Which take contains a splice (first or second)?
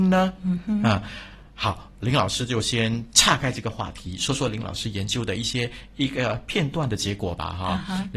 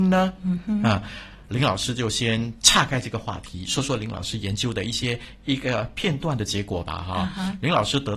second